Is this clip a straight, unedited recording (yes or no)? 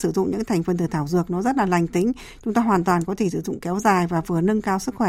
yes